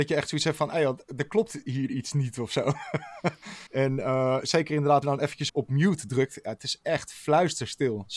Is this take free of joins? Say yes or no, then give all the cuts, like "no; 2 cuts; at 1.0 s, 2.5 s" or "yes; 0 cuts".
no; 3 cuts; at 3.7 s, 5.0 s, 5.5 s